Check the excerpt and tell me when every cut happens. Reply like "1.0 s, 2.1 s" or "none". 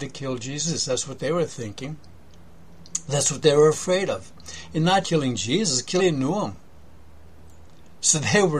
5.0 s, 6.0 s